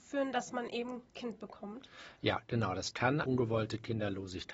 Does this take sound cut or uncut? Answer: cut